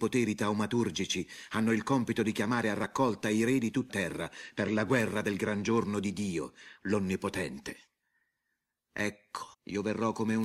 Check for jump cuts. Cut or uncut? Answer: cut